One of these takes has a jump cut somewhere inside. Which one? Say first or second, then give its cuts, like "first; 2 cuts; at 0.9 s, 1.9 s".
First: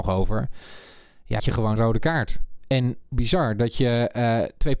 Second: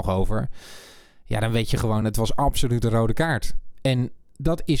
first; 3 cuts; at 1.4 s, 1.8 s, 3.1 s